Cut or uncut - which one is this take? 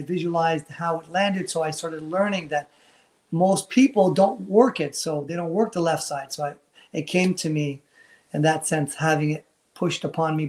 uncut